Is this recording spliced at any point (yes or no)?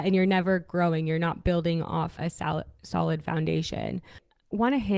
yes